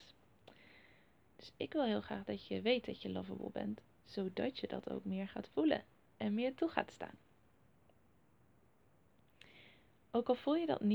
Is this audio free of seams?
yes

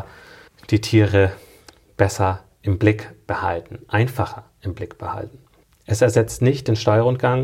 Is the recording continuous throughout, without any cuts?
yes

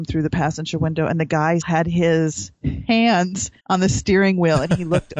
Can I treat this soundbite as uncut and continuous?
no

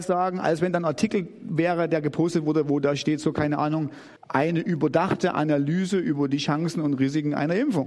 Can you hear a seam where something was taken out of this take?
yes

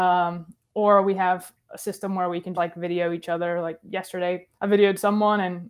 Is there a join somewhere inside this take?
yes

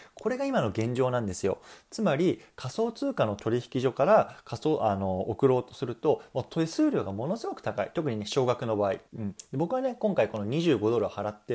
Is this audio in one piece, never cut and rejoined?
no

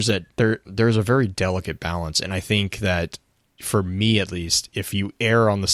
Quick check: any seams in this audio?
no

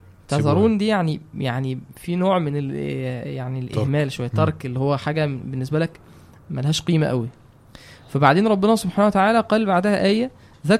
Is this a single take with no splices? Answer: yes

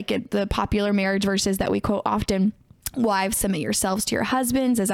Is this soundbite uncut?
yes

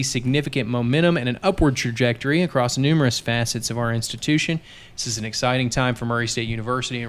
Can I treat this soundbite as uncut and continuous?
yes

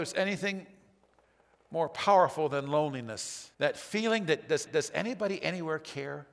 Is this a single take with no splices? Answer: no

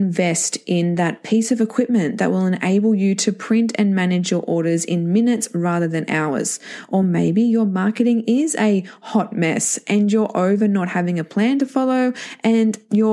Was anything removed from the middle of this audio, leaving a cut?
no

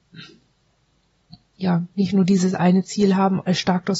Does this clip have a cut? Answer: no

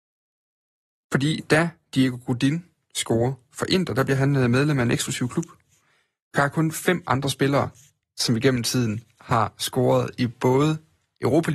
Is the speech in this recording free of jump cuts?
yes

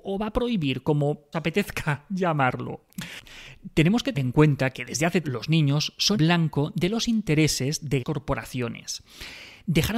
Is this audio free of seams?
no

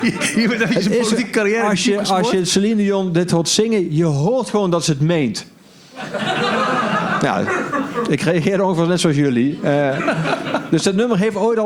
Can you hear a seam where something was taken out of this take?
no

